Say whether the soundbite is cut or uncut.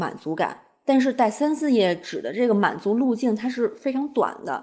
uncut